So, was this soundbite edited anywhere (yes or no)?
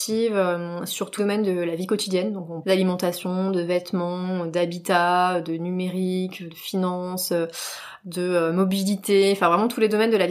yes